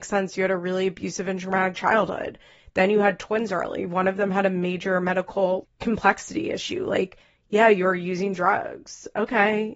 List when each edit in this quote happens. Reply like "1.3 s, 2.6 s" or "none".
5.6 s